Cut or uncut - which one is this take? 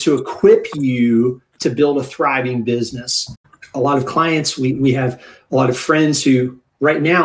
uncut